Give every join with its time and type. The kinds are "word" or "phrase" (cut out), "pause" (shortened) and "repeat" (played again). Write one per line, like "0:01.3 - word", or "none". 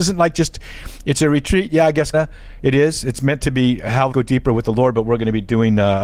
0:02.1 - word
0:04.1 - word